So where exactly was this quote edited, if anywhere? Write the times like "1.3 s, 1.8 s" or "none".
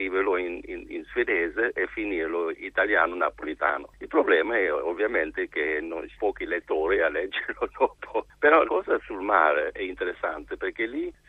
2.5 s, 6.2 s, 8.7 s